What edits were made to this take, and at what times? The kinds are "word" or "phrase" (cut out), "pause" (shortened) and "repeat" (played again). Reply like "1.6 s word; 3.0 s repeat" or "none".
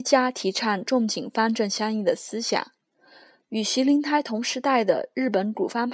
none